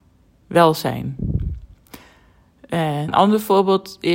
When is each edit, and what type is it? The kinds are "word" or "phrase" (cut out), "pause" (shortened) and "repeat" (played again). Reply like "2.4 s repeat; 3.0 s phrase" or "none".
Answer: 3.1 s word